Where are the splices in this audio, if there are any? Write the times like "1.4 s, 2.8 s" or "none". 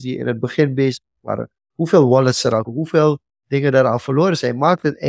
2.6 s